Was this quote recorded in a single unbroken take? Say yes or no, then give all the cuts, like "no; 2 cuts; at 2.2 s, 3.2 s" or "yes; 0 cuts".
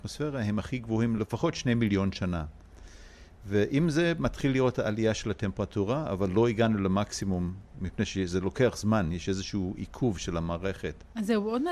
yes; 0 cuts